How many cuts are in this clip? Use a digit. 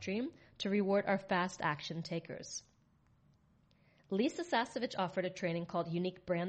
0